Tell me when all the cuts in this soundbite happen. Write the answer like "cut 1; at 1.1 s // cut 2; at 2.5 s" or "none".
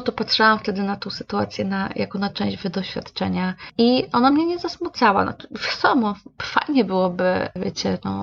none